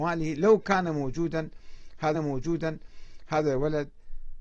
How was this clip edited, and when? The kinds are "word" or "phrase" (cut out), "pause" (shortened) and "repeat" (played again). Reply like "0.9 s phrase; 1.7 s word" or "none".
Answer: 2.1 s repeat

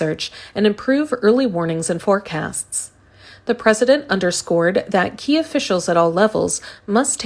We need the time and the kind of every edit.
none

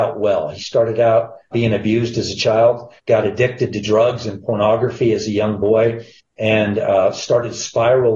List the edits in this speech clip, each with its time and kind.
1.5 s word; 3.0 s pause; 6.2 s pause

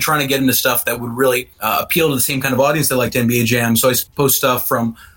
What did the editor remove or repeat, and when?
1.5 s pause; 4.1 s pause

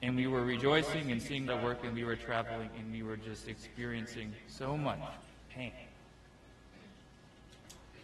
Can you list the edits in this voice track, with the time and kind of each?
1.5 s word

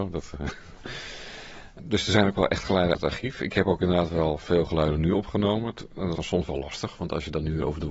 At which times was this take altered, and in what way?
1.8 s word; 2.9 s word; 6.2 s word

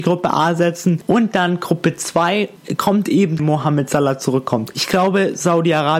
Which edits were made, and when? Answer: 3.4 s phrase

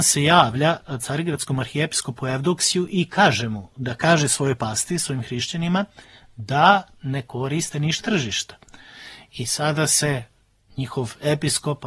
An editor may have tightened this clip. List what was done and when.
8.0 s word

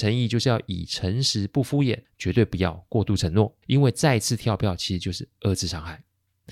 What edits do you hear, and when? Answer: 2.0 s pause; 3.6 s pause

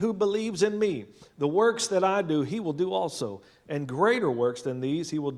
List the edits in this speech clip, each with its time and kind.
none

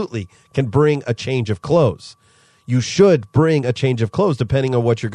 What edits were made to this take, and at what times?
none

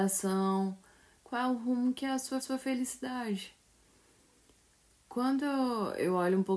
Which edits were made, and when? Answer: 2.4 s repeat

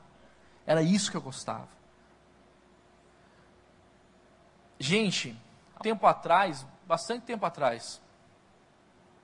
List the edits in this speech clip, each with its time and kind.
5.8 s word

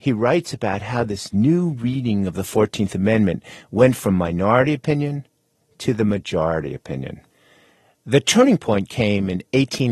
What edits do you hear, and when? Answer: none

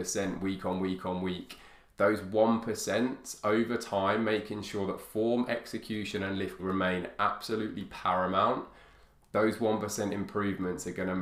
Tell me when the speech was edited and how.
6.6 s word

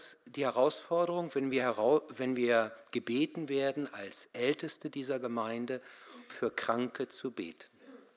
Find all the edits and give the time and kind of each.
6.3 s word

